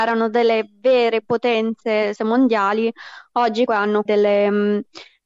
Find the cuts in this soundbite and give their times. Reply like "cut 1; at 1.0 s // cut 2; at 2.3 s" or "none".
cut 1; at 2.2 s // cut 2; at 3.7 s // cut 3; at 4.1 s